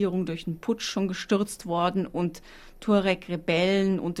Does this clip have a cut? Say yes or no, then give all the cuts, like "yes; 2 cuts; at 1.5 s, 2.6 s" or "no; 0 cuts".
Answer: no; 0 cuts